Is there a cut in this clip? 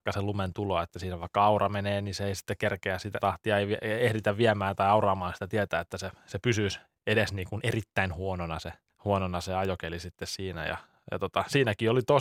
yes; 2 cuts; at 3.2 s, 8.9 s

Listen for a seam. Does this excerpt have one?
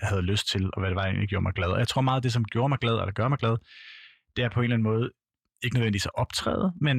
no; 0 cuts

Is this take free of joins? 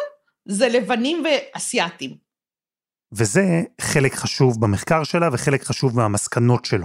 yes; 0 cuts

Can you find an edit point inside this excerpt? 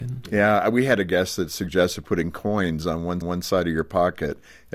yes; 1 cut; at 3.2 s

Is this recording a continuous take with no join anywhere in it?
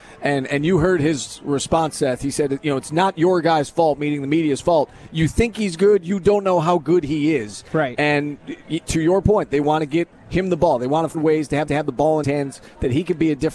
no; 4 cuts; at 10.1 s, 11.1 s, 11.7 s, 12.2 s

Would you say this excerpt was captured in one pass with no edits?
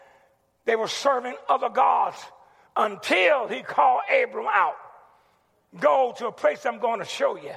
yes; 0 cuts

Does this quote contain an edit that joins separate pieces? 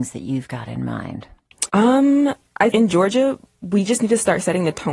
yes; 2 cuts; at 1.7 s, 2.7 s

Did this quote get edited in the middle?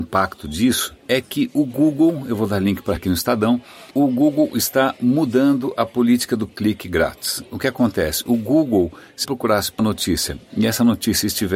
yes; 6 cuts; at 1.0 s, 3.0 s, 3.9 s, 6.5 s, 9.2 s, 9.8 s

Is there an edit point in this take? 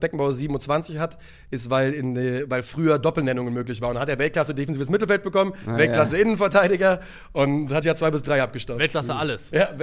yes; 1 cut; at 7.8 s

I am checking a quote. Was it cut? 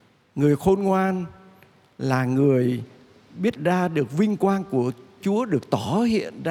yes; 2 cuts; at 3.6 s, 5.2 s

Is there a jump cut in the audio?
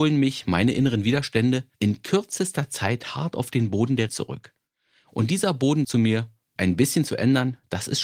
yes; 4 cuts; at 1.7 s, 4.1 s, 5.8 s, 6.6 s

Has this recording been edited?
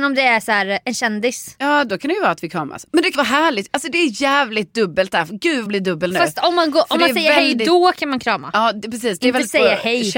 yes; 2 cuts; at 3.1 s, 5.7 s

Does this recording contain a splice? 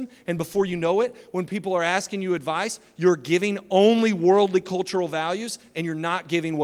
no; 0 cuts

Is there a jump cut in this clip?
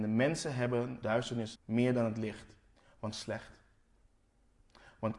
yes; 3 cuts; at 1.0 s, 1.5 s, 3.1 s

